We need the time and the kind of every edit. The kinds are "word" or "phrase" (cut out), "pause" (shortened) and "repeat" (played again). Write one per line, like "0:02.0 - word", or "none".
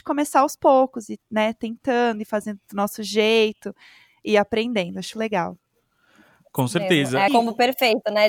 0:05.1 - word
0:07.3 - word

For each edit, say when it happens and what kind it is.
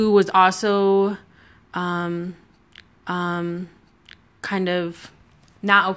0:03.0 - repeat

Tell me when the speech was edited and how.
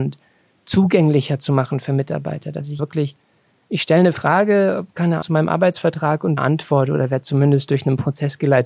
0:02.8 - word
0:05.2 - word
0:06.4 - word

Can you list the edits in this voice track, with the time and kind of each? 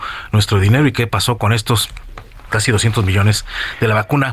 0:02.5 - word

